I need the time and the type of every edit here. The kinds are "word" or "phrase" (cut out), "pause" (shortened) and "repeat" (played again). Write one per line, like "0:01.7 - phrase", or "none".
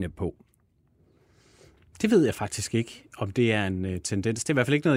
none